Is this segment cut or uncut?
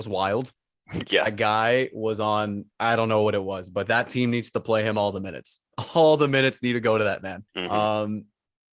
cut